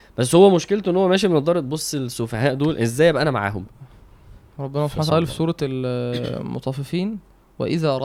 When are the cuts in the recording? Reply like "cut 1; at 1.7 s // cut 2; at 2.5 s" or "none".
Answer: cut 1; at 5.1 s